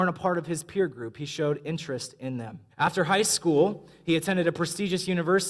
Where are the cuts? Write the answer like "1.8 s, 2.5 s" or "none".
2.7 s